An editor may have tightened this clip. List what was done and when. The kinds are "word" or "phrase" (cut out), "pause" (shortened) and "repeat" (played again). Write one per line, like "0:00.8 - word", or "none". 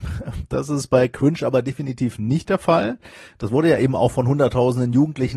none